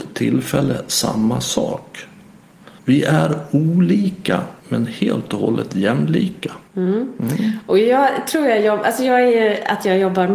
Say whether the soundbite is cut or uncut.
cut